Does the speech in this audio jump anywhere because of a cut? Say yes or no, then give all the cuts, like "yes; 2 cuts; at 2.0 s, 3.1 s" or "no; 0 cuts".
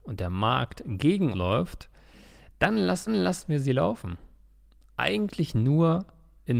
yes; 2 cuts; at 1.3 s, 3.1 s